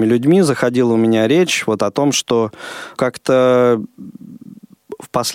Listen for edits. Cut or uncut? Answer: cut